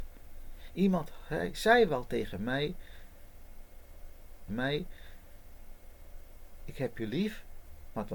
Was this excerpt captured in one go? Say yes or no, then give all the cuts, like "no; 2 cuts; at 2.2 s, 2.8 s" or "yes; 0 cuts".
no; 1 cut; at 4.5 s